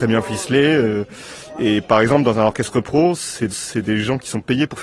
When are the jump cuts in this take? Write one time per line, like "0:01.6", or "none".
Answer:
0:03.5